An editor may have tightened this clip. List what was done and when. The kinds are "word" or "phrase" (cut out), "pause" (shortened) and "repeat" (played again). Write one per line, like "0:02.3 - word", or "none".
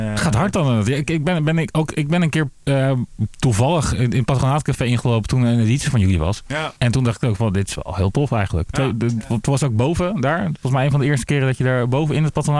0:06.8 - pause

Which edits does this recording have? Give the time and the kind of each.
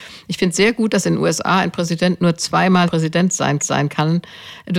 0:02.9 - word
0:03.6 - repeat

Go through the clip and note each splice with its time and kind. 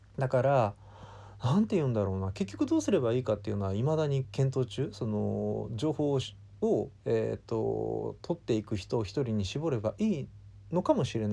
0:07.0 - pause

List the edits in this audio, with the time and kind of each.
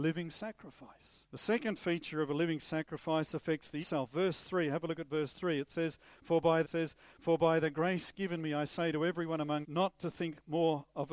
0:01.3 - pause
0:03.8 - word
0:06.6 - repeat
0:09.6 - word

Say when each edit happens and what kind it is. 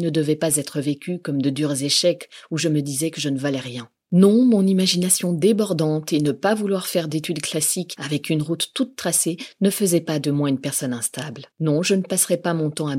0:11.5 - pause

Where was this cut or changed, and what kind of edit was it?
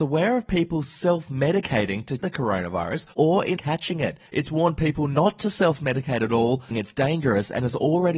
0:02.2 - word
0:03.1 - pause
0:03.6 - phrase
0:04.3 - pause
0:06.7 - word

